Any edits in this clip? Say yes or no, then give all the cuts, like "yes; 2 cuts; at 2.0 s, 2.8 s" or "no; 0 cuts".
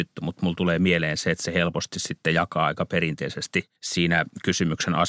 yes; 1 cut; at 3.8 s